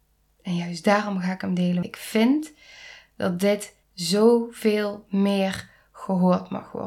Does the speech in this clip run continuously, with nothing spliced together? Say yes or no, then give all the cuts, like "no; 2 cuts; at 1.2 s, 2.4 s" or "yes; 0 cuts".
no; 2 cuts; at 1.8 s, 3.8 s